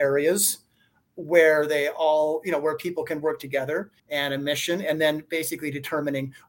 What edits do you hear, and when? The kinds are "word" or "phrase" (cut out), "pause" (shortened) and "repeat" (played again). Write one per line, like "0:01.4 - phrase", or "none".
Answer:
0:04.0 - pause